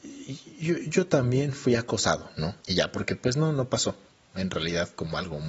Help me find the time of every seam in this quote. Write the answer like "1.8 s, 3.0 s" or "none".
2.6 s, 4.1 s